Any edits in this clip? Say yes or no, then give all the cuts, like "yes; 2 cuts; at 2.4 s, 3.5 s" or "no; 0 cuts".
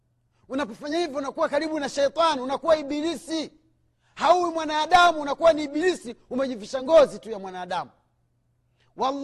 no; 0 cuts